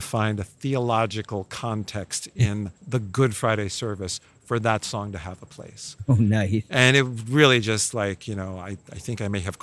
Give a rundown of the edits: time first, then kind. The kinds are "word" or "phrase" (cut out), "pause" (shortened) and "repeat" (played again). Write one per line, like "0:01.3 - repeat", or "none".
0:02.8 - pause